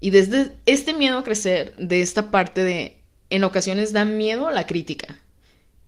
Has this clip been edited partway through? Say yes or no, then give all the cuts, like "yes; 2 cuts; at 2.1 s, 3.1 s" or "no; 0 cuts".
no; 0 cuts